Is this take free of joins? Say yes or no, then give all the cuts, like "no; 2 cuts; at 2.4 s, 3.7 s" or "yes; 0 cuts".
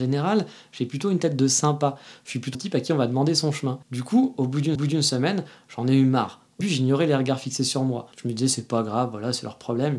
no; 5 cuts; at 2.5 s, 3.8 s, 4.8 s, 6.6 s, 8.1 s